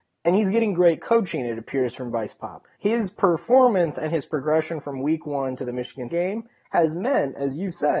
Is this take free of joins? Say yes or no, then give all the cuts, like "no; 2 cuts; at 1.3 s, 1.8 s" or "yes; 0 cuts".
no; 2 cuts; at 2.7 s, 6.1 s